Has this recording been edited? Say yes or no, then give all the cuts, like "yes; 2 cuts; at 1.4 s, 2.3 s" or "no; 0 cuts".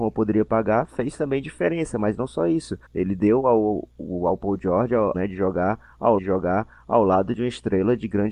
yes; 3 cuts; at 2.8 s, 5.1 s, 6.2 s